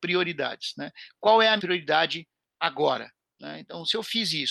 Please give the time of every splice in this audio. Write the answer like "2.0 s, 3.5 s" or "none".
1.6 s